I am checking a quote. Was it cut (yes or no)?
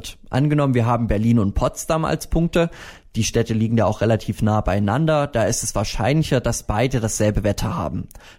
no